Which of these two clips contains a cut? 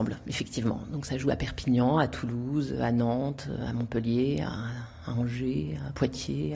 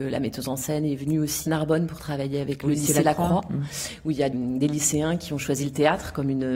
second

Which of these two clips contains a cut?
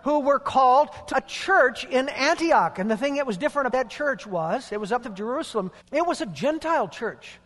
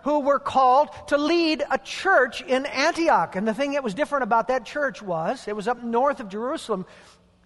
first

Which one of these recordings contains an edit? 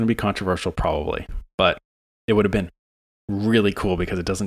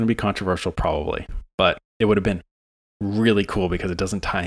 second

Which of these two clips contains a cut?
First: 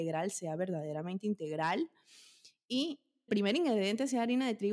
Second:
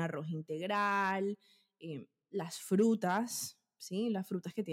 first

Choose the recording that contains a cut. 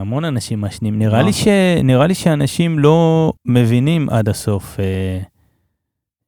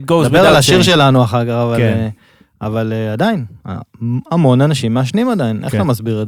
first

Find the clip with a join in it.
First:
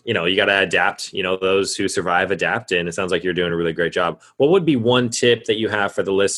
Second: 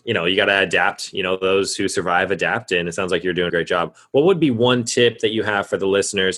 second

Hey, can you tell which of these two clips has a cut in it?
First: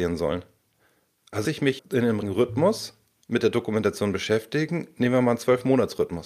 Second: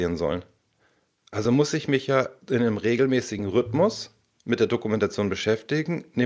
first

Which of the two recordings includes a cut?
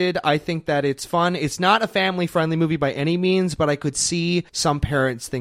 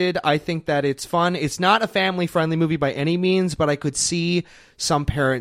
first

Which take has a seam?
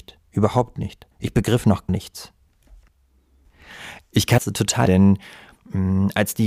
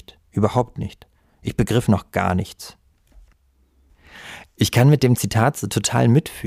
first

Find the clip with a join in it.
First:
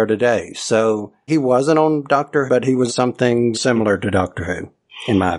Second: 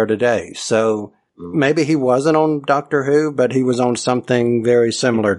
first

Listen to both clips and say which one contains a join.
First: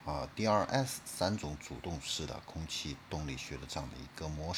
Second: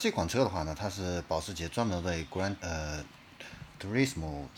second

